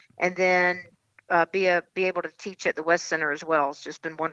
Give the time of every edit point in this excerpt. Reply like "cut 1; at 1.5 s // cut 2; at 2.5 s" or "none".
none